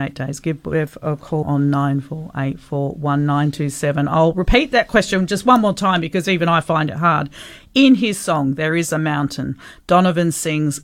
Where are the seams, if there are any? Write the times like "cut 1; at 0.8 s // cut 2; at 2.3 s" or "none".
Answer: cut 1; at 1.4 s